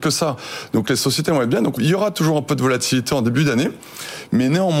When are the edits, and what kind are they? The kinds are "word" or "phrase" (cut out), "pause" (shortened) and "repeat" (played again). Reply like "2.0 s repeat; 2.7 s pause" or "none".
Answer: 1.8 s word